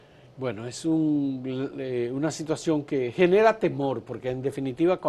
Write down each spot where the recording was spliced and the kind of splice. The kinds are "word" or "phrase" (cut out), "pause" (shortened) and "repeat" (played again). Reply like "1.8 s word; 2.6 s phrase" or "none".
none